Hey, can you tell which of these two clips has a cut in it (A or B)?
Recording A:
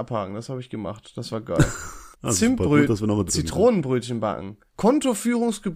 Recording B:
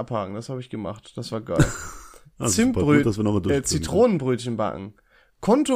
A